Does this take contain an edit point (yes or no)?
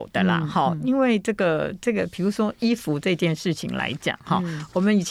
no